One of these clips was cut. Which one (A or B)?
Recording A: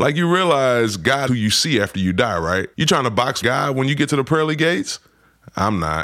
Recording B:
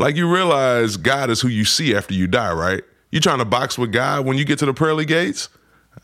A